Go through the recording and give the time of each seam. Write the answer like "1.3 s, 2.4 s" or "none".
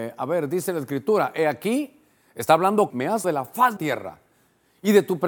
2.9 s, 3.2 s, 3.8 s